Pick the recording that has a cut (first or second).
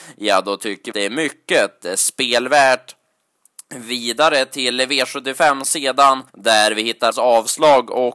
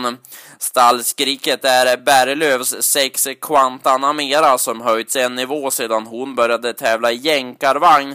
first